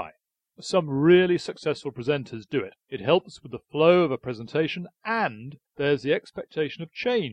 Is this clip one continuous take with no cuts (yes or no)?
no